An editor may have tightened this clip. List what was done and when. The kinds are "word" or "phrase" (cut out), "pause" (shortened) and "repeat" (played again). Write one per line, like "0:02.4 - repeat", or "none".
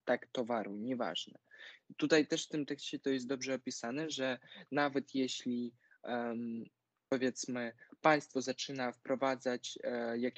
none